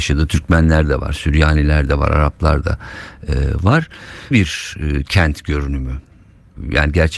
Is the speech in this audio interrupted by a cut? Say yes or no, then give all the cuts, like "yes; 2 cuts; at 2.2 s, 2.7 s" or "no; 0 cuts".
yes; 1 cut; at 4.3 s